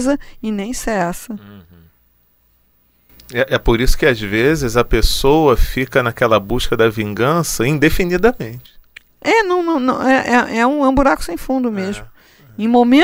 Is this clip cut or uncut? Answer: uncut